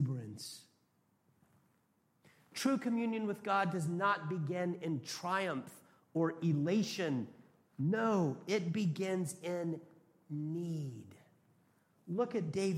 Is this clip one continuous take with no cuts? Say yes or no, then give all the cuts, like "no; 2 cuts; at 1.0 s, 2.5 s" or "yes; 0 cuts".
yes; 0 cuts